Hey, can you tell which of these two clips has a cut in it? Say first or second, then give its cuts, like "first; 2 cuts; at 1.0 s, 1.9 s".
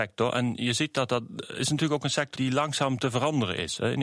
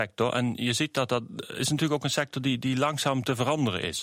first; 1 cut; at 2.3 s